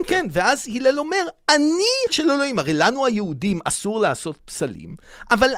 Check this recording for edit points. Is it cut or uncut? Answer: cut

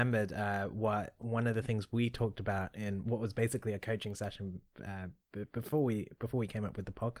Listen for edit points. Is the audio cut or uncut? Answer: uncut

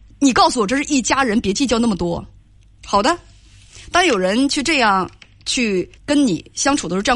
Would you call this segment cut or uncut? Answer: cut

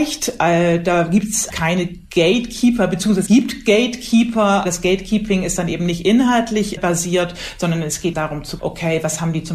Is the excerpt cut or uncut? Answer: cut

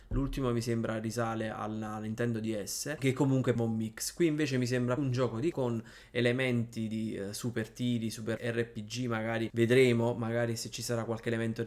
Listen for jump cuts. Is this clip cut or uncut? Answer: cut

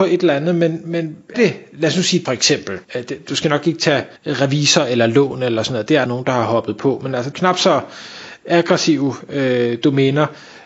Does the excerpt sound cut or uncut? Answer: cut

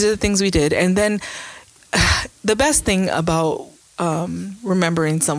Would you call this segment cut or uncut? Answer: uncut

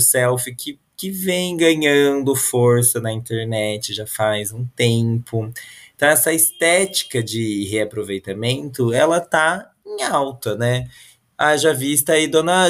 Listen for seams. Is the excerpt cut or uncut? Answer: uncut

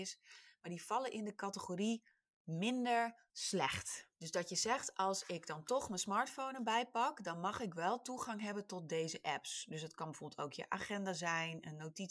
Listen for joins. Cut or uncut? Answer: uncut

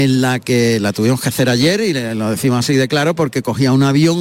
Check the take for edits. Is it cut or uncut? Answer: uncut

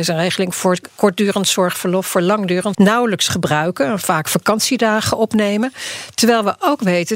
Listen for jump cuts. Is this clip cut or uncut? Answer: cut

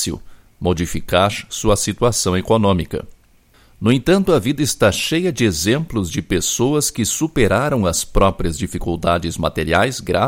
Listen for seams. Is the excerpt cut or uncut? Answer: uncut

